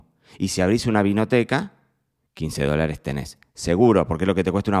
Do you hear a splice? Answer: no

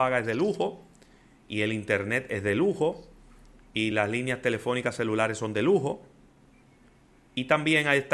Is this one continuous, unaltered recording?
yes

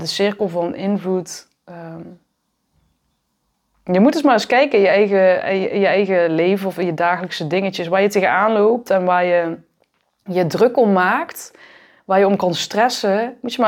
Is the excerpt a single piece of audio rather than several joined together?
yes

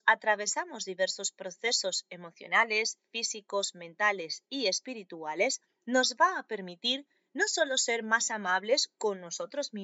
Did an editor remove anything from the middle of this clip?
no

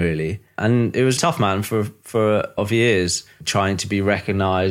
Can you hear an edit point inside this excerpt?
yes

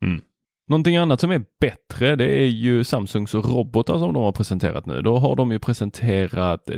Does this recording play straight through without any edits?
yes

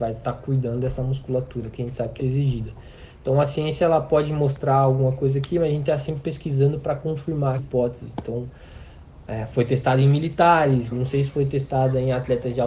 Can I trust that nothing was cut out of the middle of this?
no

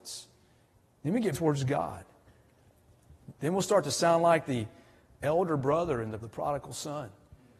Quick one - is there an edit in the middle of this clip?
yes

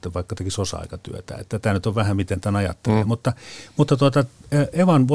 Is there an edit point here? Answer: no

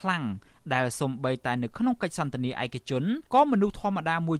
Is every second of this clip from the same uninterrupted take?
no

